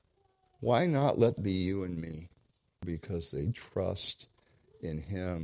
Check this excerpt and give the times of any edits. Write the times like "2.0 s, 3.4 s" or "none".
1.4 s, 2.5 s

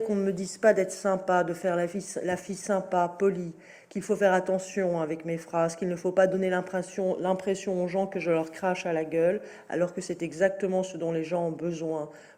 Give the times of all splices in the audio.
none

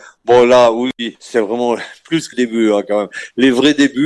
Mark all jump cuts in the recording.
1.1 s, 2.3 s

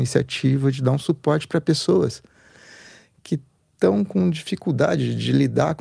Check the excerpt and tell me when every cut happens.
none

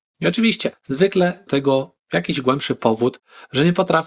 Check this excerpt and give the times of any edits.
1.5 s

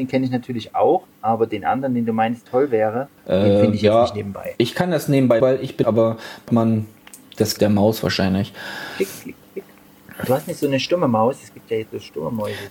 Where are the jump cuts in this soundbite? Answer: 1.1 s, 2.5 s, 3.2 s, 5.4 s, 5.8 s, 6.5 s, 7.6 s

